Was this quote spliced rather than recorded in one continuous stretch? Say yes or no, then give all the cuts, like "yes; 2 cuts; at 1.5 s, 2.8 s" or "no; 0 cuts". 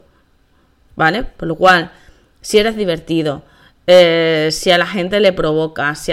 no; 0 cuts